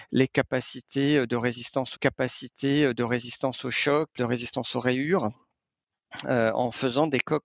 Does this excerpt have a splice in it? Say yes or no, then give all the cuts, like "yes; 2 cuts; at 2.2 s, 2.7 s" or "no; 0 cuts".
yes; 2 cuts; at 1.9 s, 4.2 s